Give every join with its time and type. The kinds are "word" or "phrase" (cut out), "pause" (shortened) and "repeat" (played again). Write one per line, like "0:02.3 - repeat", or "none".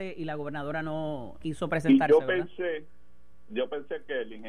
0:01.4 - word